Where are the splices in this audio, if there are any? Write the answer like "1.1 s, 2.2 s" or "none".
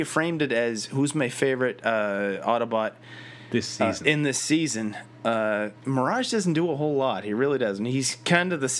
5.8 s

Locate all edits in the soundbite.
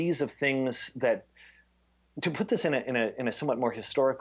none

